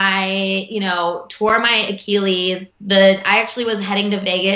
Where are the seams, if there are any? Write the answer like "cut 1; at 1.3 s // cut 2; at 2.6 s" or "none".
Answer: cut 1; at 2.7 s